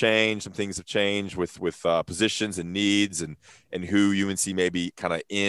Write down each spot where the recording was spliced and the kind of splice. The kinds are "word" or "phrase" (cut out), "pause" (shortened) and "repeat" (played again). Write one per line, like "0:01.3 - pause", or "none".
none